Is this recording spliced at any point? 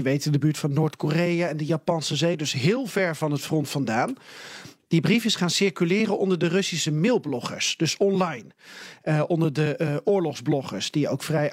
no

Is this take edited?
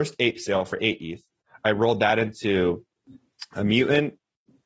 no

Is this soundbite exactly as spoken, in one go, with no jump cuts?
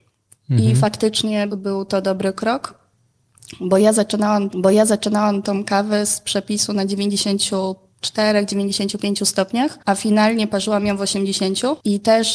no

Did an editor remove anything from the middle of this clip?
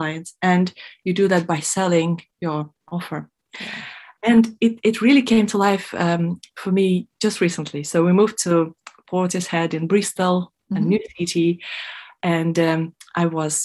yes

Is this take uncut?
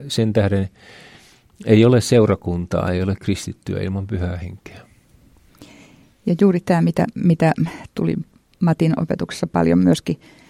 yes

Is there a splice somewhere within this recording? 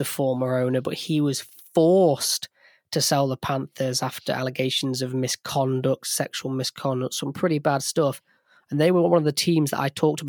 no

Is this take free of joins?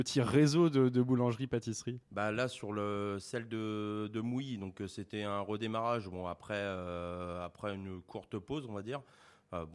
no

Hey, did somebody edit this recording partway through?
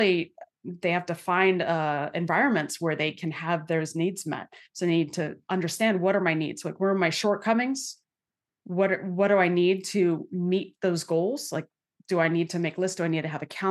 no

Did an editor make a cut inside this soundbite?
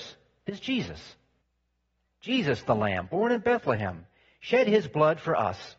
no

